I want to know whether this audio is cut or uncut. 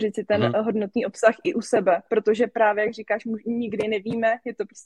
uncut